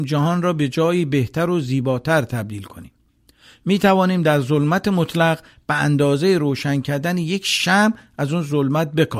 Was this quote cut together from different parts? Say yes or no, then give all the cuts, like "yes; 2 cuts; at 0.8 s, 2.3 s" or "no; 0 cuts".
no; 0 cuts